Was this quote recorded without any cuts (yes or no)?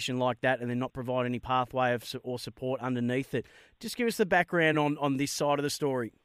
yes